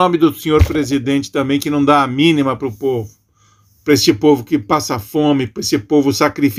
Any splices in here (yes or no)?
no